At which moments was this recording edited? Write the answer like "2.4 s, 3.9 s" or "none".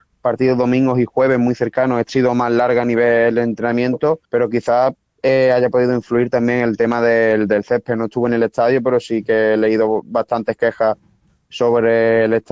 2.1 s, 4.2 s